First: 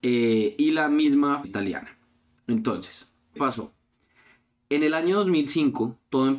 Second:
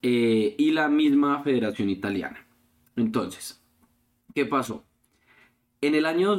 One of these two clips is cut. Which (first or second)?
first